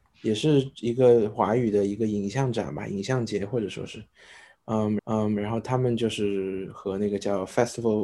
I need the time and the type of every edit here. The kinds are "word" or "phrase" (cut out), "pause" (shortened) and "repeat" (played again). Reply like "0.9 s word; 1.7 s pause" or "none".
5.0 s repeat